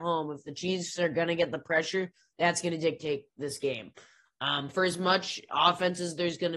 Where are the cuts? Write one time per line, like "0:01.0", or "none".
none

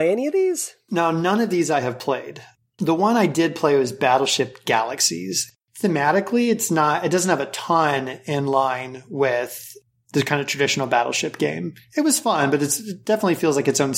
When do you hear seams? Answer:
none

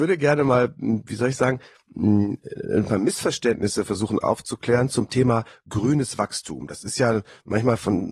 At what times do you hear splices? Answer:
none

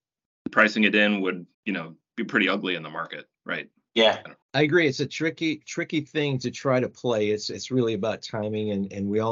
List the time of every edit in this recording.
0:01.5
0:03.3
0:04.4

